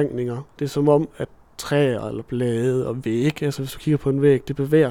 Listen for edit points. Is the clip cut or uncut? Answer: uncut